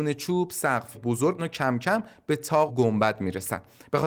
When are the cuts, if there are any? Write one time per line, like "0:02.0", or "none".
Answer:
0:00.9
0:01.4
0:02.7